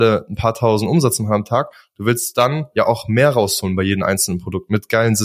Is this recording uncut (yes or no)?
yes